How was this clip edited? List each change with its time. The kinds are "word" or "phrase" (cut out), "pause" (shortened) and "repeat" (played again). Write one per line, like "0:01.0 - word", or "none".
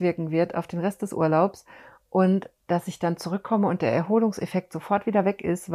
none